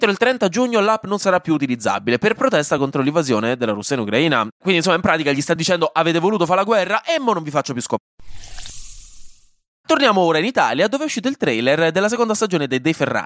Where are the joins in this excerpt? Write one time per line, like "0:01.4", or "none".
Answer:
none